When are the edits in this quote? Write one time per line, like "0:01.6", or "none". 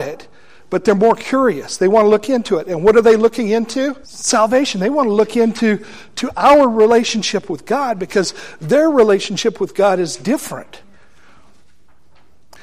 0:04.0